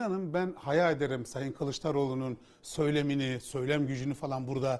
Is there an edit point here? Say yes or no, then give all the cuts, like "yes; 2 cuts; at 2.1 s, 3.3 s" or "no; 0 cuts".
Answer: no; 0 cuts